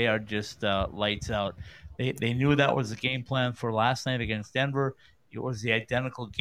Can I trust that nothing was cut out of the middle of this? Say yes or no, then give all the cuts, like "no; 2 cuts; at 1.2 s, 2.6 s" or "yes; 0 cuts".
yes; 0 cuts